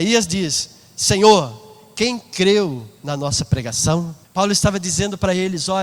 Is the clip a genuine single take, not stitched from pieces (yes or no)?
no